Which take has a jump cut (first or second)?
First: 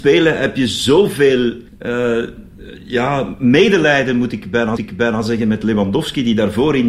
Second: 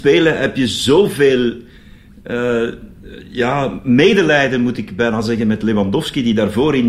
first